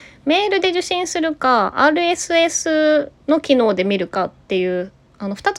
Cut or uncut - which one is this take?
cut